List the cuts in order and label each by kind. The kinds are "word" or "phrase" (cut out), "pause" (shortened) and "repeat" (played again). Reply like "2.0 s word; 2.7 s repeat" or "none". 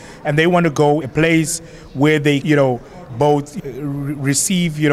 1.0 s word; 2.4 s word; 3.1 s word; 3.6 s word